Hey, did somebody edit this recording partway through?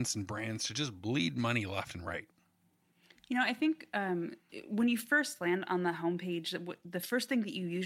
no; 0 cuts

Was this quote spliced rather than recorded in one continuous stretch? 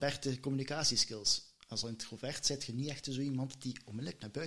no; 0 cuts

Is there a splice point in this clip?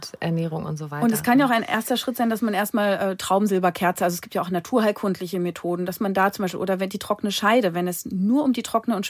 no; 0 cuts

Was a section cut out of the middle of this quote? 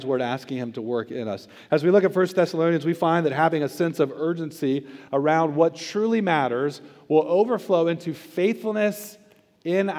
no; 0 cuts

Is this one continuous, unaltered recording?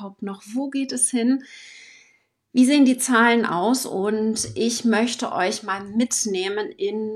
yes; 0 cuts

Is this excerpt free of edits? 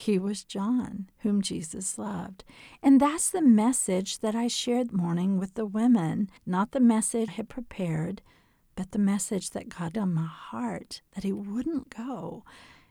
no; 6 cuts; at 1.2 s, 4.9 s, 6.4 s, 7.3 s, 9.9 s, 11.8 s

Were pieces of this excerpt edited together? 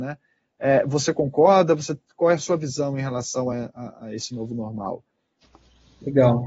no; 0 cuts

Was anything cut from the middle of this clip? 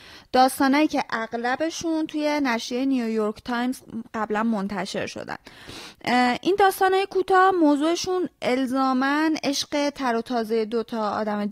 no; 0 cuts

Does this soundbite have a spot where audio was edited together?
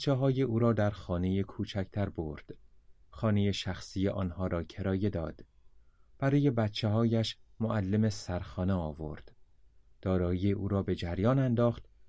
no; 0 cuts

